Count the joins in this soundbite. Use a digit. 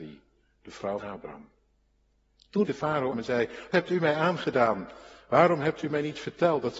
4